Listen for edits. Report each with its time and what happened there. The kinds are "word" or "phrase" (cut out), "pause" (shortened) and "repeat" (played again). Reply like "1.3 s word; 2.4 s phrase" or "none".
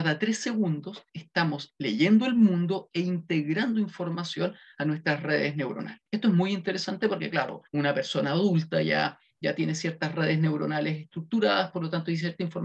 1.1 s pause; 6.1 s pause; 7.7 s pause